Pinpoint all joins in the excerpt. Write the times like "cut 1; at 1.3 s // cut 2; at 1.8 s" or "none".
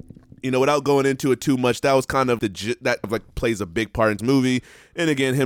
cut 1; at 2.4 s // cut 2; at 3.0 s // cut 3; at 4.2 s